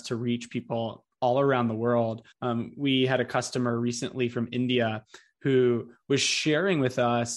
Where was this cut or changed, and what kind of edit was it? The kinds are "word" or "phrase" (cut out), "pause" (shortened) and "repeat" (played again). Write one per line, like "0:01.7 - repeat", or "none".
0:02.3 - pause